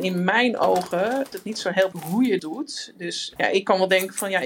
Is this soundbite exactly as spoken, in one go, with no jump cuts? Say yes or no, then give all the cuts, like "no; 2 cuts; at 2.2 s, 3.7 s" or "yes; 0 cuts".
no; 4 cuts; at 1.3 s, 1.9 s, 2.4 s, 3.4 s